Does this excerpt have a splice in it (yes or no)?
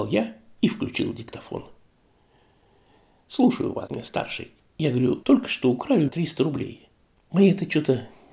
yes